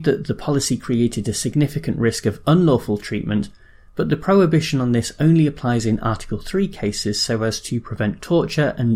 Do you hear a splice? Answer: no; 0 cuts

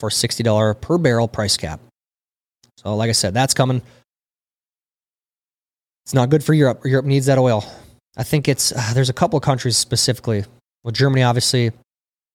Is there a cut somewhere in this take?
no; 0 cuts

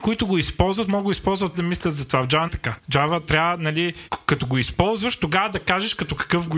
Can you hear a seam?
yes; 2 cuts; at 1.5 s, 2.5 s

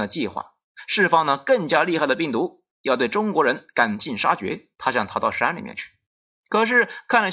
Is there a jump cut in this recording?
yes; 1 cut; at 4.7 s

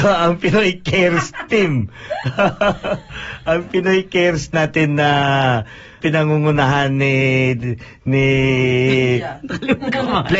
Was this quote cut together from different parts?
yes; 2 cuts; at 4.5 s, 6.0 s

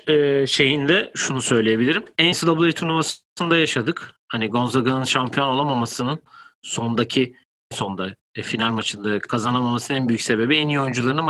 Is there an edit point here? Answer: yes; 2 cuts; at 2.3 s, 7.7 s

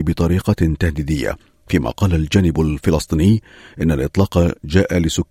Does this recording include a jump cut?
no; 0 cuts

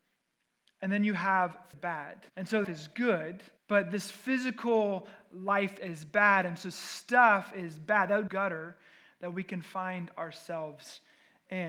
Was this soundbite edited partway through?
yes; 6 cuts; at 1.7 s, 2.3 s, 2.6 s, 3.6 s, 5.8 s, 8.3 s

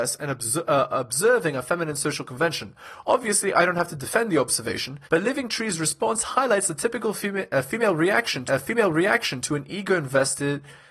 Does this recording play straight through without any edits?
no; 2 cuts; at 5.0 s, 8.5 s

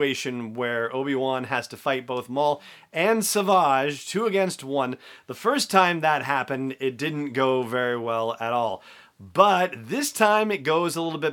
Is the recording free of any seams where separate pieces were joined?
yes; 0 cuts

